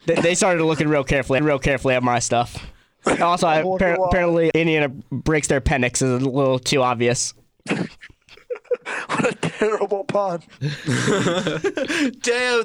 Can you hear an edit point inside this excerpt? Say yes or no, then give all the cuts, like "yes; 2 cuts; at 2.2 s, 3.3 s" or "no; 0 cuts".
yes; 2 cuts; at 1.4 s, 4.5 s